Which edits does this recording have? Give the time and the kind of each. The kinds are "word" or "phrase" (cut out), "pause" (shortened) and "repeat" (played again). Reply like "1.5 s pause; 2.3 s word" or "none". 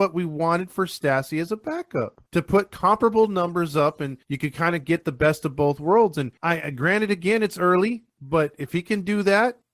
2.3 s pause; 4.2 s pause; 6.4 s pause